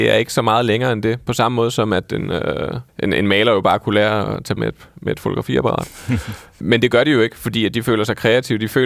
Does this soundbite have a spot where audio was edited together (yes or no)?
yes